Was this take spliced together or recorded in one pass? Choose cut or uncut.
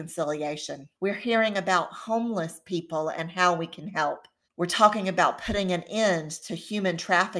cut